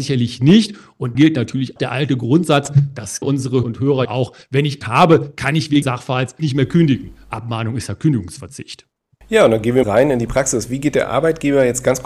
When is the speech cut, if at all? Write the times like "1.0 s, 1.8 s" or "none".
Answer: 1.1 s, 1.8 s, 3.2 s, 3.6 s, 4.0 s, 4.8 s, 5.8 s, 6.4 s, 9.8 s